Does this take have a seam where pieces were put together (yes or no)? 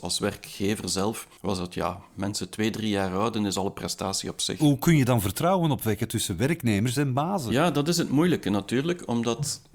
yes